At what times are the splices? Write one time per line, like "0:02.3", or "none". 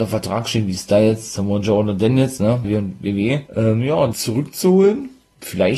0:02.6
0:03.5
0:04.1